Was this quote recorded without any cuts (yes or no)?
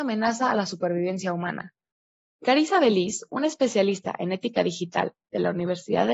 yes